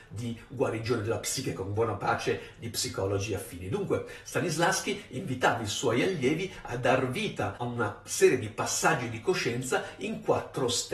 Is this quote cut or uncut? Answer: uncut